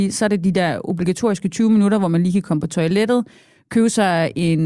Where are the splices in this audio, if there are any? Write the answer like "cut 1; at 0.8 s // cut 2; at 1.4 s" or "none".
none